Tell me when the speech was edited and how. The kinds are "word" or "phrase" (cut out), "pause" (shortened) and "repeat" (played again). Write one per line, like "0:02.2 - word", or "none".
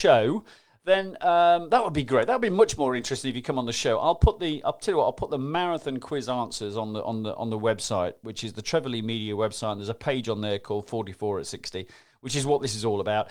none